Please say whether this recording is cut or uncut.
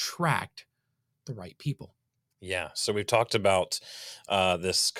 uncut